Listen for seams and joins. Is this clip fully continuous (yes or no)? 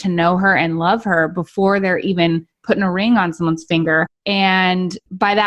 yes